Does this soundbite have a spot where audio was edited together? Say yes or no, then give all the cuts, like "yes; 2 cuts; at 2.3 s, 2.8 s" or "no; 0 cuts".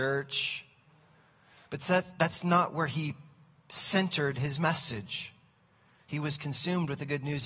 no; 0 cuts